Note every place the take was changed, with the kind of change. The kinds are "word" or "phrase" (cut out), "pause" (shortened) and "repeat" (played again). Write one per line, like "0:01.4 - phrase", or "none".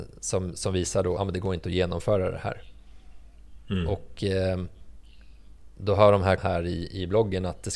0:01.2 - phrase
0:06.4 - phrase